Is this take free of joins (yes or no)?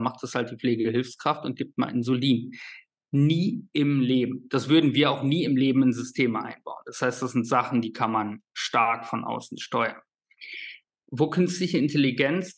yes